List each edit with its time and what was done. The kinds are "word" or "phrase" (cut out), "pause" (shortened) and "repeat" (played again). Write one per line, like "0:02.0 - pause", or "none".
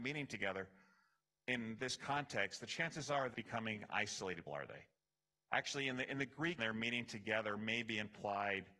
0:03.3 - word
0:04.5 - word
0:06.6 - word